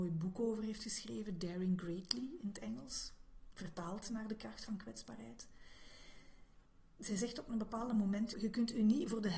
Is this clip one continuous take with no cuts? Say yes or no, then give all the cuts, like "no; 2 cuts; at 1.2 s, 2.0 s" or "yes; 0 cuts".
yes; 0 cuts